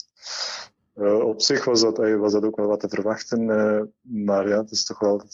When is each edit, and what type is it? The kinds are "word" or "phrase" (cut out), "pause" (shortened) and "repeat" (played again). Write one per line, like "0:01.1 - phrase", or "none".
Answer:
none